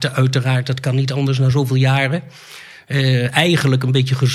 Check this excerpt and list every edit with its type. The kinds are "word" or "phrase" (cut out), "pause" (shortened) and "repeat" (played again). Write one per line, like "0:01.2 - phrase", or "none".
none